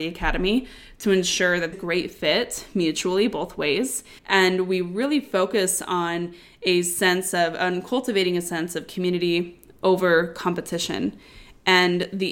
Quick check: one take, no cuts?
no; 2 cuts; at 1.7 s, 4.2 s

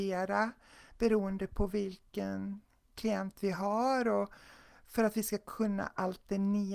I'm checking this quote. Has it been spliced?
no; 0 cuts

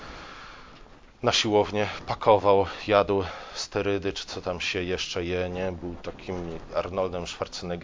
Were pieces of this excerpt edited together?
no; 0 cuts

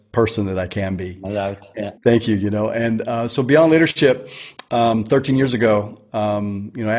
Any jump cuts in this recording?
yes; 1 cut; at 2.0 s

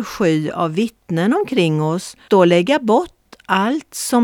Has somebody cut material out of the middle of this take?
yes; 1 cut; at 2.3 s

